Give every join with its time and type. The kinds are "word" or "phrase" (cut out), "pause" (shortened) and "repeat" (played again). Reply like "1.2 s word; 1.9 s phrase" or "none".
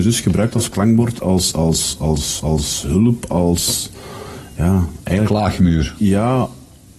1.5 s word; 2.4 s repeat